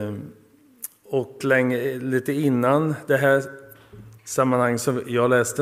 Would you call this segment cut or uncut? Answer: cut